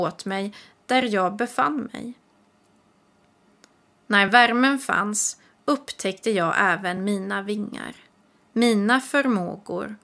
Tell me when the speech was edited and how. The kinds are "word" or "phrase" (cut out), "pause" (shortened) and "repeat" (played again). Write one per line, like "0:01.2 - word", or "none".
none